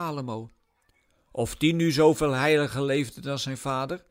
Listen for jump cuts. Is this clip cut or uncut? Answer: uncut